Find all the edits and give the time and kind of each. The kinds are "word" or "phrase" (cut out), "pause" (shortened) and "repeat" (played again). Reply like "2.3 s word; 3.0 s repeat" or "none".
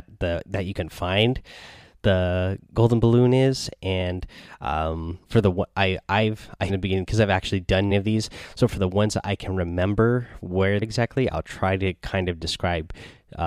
2.6 s pause; 5.2 s pause; 6.7 s phrase; 7.9 s word; 10.8 s phrase